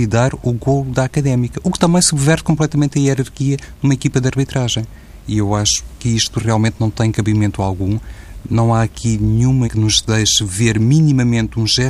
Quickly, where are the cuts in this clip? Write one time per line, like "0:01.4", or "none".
0:09.6